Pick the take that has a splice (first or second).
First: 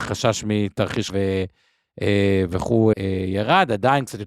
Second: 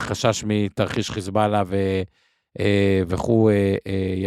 first